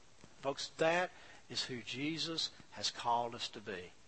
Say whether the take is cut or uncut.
uncut